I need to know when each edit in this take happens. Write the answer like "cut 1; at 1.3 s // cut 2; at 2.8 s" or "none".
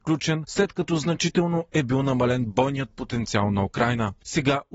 none